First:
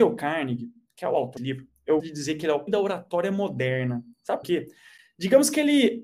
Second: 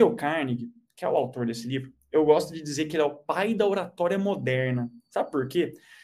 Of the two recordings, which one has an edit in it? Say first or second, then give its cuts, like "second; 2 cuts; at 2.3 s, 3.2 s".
first; 4 cuts; at 1.4 s, 2.0 s, 2.7 s, 4.4 s